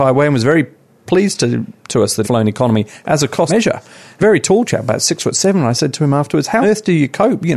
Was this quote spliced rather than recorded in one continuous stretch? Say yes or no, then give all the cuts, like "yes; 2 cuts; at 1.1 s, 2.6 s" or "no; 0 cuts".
yes; 5 cuts; at 1.8 s, 2.2 s, 3.5 s, 4.2 s, 6.6 s